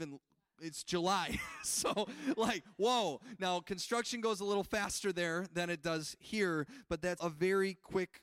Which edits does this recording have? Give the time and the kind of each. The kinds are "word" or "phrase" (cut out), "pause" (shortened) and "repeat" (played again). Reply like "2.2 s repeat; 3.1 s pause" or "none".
7.2 s word